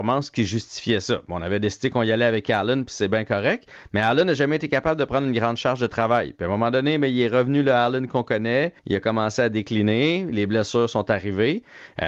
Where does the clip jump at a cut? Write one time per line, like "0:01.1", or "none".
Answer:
0:08.8